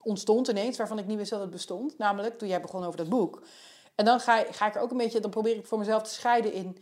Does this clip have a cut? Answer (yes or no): no